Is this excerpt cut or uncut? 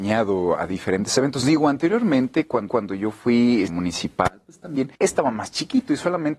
cut